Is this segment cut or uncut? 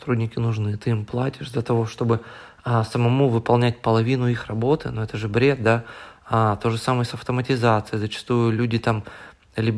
uncut